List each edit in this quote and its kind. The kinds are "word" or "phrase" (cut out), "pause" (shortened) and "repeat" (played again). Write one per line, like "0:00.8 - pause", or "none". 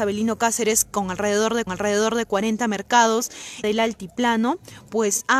0:01.7 - repeat
0:03.6 - phrase

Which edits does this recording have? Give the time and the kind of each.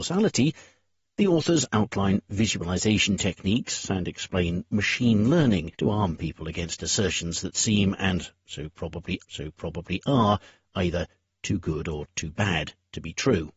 0:05.7 - pause
0:09.2 - repeat

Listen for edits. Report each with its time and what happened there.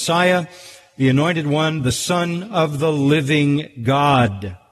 none

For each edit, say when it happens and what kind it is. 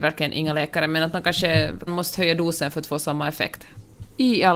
0:01.9 - word

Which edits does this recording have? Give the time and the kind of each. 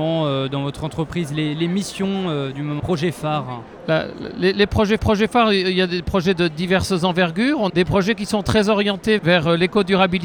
0:02.8 - word
0:05.0 - repeat
0:07.7 - word
0:09.2 - word

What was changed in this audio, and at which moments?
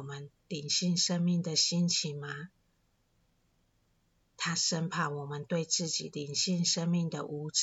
none

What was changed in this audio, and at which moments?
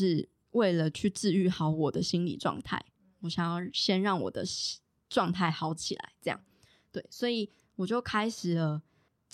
none

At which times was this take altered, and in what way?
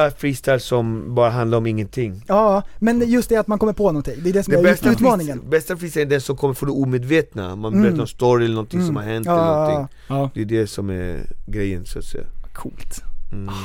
none

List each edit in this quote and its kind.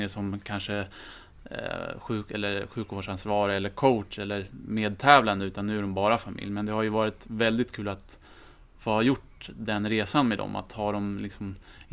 none

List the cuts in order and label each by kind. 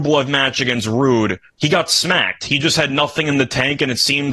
0:01.5 - pause

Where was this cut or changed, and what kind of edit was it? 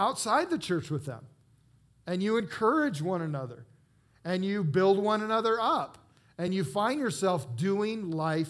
none

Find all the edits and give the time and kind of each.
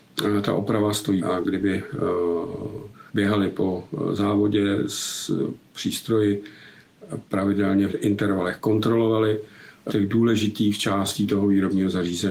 0:01.2 - word
0:03.1 - pause
0:07.9 - word
0:09.9 - word

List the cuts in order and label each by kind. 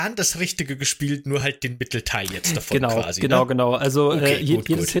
none

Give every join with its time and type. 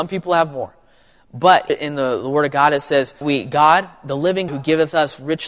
0:01.7 - word
0:03.2 - word
0:04.5 - word

